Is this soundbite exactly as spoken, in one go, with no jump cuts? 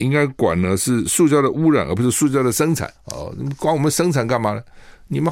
no; 1 cut; at 3.0 s

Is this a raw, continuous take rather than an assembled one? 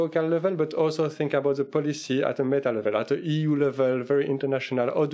yes; 0 cuts

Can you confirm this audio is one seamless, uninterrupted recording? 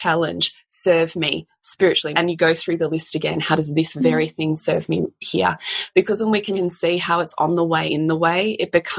no; 3 cuts; at 2.1 s, 6.5 s, 7.9 s

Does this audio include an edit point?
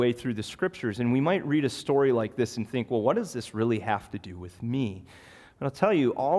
no; 0 cuts

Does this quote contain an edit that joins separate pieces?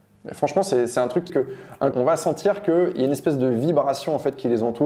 yes; 2 cuts; at 1.3 s, 1.9 s

